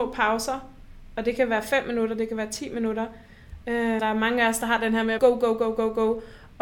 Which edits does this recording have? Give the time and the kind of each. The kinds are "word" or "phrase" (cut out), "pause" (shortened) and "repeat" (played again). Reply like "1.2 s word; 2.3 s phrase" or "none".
4.0 s word; 5.2 s word